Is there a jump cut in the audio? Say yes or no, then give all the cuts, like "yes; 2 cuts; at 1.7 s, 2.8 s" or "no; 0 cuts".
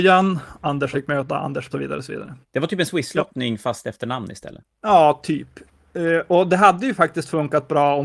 yes; 4 cuts; at 0.9 s, 1.7 s, 2.4 s, 4.7 s